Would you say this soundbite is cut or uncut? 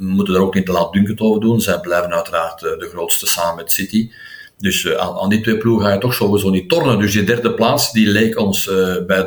uncut